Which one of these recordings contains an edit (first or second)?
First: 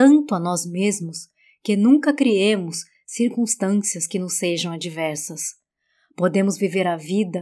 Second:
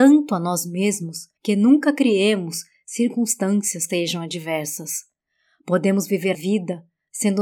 second